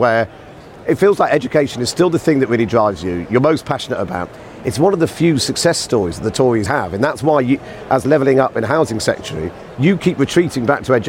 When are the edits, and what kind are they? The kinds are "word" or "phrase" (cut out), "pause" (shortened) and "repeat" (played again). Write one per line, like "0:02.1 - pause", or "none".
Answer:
0:06.7 - word